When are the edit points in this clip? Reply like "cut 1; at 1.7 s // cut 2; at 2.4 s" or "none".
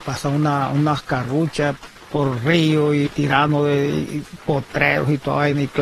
none